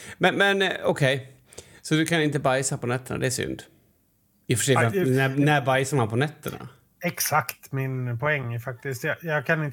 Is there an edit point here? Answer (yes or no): no